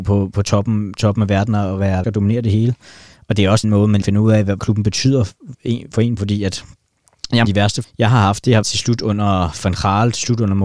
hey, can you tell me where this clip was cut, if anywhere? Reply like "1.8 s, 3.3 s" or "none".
2.0 s, 3.6 s, 4.0 s, 4.6 s, 5.5 s, 6.2 s, 7.4 s, 7.8 s, 8.6 s

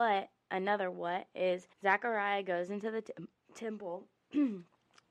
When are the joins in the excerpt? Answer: 1.7 s

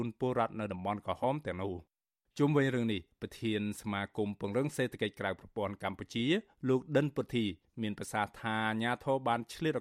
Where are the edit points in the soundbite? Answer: none

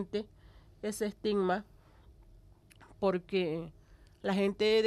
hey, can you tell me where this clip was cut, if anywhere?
none

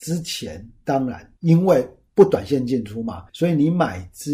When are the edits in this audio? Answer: 1.4 s, 3.3 s

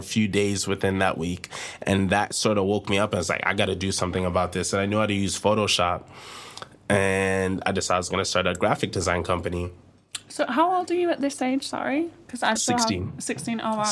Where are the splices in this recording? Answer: 12.6 s

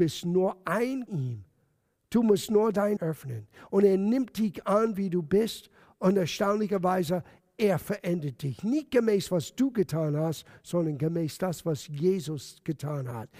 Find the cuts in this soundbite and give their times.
1.1 s, 3.0 s

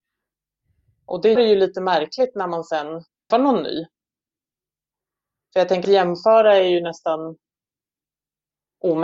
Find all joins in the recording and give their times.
1.3 s, 3.3 s, 5.8 s

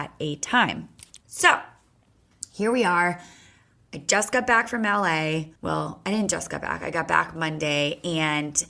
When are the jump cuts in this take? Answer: 1.2 s, 5.6 s

